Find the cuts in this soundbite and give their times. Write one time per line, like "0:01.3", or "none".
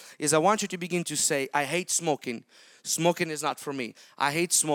none

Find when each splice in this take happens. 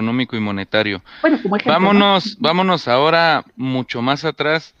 none

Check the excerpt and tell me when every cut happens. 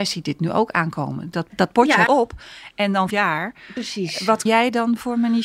0:01.5
0:02.1
0:03.1
0:04.5

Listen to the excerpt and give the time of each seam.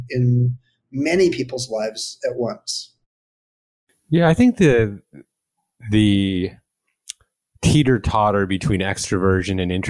none

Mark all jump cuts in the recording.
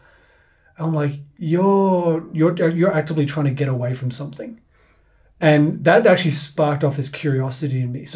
none

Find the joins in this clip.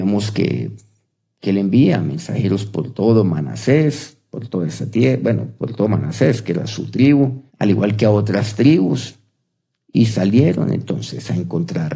0:07.5

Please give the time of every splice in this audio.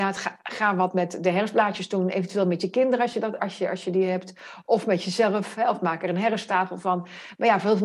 0:03.4

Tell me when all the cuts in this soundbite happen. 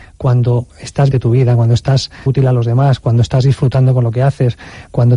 0:01.1
0:02.3

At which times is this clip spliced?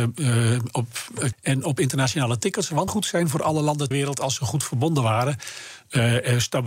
0:01.3
0:02.9
0:03.9

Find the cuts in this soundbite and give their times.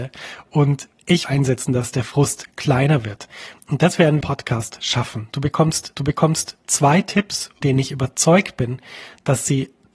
0:01.2
0:04.2
0:06.0
0:07.6

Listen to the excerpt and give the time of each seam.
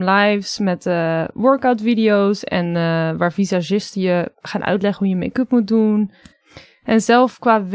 none

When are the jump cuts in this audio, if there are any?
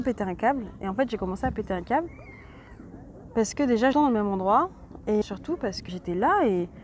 0:03.9
0:05.2
0:05.9

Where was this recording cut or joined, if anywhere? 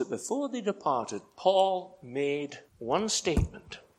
0:02.7

